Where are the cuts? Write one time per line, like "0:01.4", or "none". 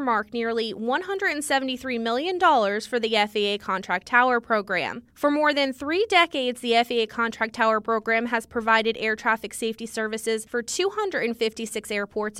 none